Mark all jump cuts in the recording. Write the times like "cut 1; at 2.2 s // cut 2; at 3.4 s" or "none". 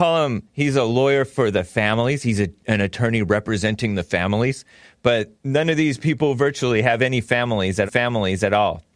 cut 1; at 5.4 s // cut 2; at 7.9 s